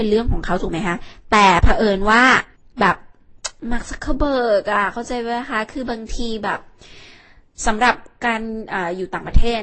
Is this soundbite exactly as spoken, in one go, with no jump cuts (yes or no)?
no